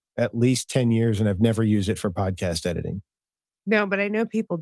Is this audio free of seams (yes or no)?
yes